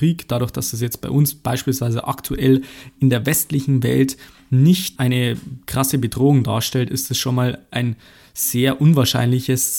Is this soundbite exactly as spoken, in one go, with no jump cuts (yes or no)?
yes